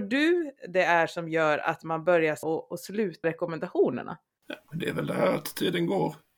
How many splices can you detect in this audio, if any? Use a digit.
2